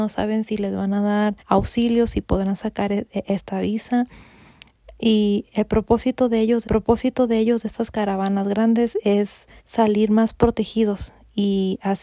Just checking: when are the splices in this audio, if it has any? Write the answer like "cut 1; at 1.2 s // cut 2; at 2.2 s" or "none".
cut 1; at 1.4 s // cut 2; at 6.6 s // cut 3; at 9.6 s